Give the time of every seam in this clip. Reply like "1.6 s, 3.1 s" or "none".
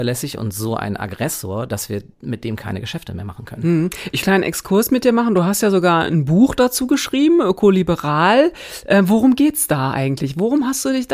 2.1 s, 4.2 s